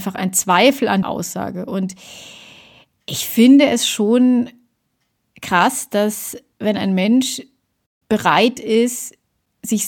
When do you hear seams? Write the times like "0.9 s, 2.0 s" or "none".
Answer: 1.0 s